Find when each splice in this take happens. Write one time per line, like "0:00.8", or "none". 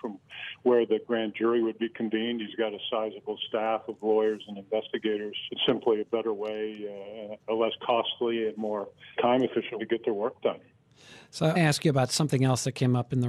0:05.5
0:09.2
0:09.8
0:11.6